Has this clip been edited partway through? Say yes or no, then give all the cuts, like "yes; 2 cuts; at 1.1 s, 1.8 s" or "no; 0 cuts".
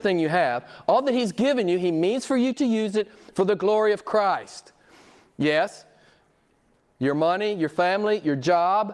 no; 0 cuts